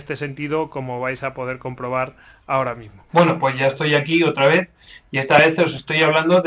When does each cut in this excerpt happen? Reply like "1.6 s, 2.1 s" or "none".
3.1 s

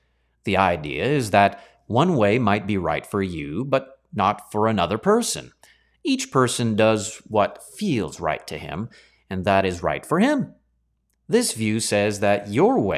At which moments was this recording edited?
none

